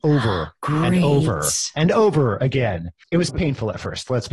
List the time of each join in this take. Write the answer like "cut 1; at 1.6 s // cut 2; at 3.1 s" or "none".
cut 1; at 3.3 s

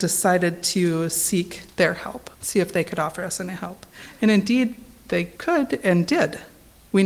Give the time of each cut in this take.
cut 1; at 1.7 s // cut 2; at 2.3 s // cut 3; at 5.3 s

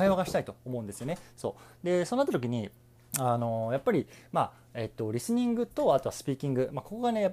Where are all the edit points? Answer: cut 1; at 2.9 s

